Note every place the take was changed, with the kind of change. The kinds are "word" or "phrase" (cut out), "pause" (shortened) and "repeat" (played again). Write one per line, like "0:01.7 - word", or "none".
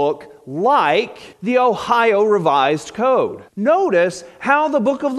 0:01.3 - pause
0:03.5 - pause